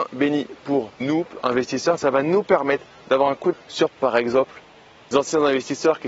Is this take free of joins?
no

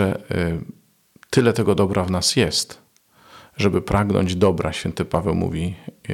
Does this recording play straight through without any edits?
yes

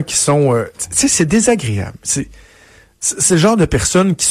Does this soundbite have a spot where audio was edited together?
no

